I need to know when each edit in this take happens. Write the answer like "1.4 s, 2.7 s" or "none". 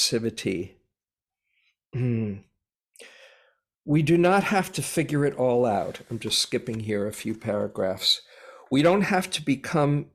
none